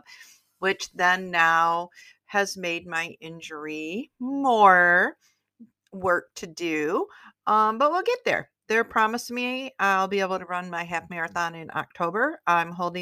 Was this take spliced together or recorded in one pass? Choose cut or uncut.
uncut